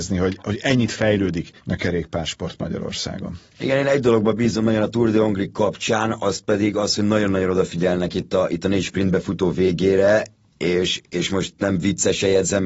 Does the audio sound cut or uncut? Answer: cut